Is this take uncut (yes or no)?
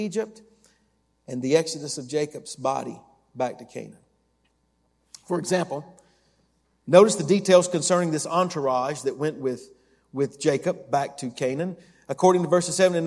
yes